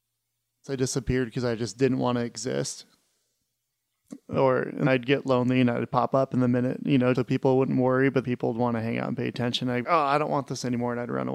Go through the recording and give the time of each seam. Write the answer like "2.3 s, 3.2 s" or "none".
4.9 s, 7.1 s, 8.2 s, 9.8 s